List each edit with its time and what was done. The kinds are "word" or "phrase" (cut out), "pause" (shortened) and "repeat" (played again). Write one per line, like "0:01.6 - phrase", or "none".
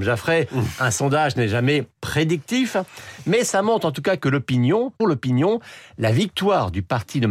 0:01.9 - pause
0:05.0 - word